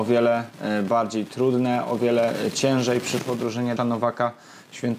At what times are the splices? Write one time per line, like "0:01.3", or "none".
0:03.8